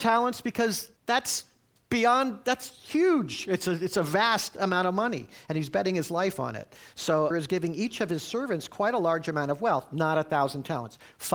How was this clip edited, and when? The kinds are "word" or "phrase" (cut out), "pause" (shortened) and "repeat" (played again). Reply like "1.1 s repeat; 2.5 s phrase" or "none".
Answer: 1.0 s pause; 7.3 s phrase